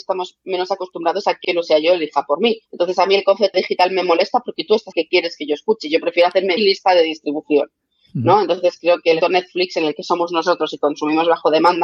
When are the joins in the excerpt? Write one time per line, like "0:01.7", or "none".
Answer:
0:01.4
0:02.7
0:03.5
0:04.9
0:06.6
0:09.2